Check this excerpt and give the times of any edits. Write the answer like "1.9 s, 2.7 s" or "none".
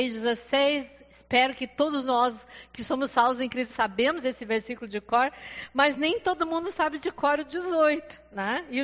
3.7 s